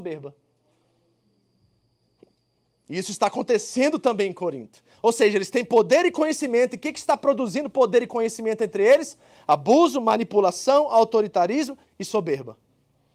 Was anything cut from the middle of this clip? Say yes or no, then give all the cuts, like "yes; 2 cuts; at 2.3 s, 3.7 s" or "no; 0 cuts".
no; 0 cuts